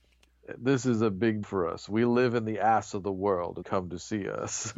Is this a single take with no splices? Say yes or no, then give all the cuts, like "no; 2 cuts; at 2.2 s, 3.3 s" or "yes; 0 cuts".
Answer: no; 2 cuts; at 1.4 s, 3.6 s